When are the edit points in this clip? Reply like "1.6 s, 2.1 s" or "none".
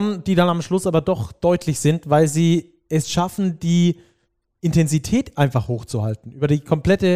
none